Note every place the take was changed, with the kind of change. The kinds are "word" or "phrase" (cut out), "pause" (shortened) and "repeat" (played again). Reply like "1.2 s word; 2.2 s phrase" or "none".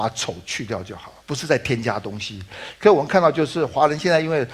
1.2 s pause